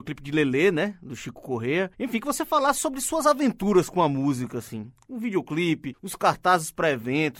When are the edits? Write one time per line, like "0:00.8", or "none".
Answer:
none